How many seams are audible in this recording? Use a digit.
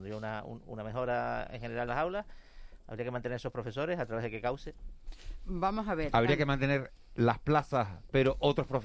1